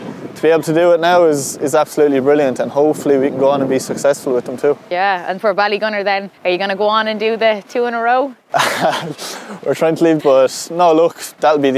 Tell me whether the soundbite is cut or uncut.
cut